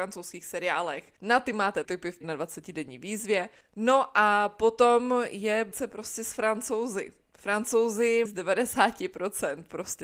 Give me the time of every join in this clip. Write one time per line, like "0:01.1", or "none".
0:01.2
0:01.8
0:02.2
0:03.6
0:05.7
0:08.2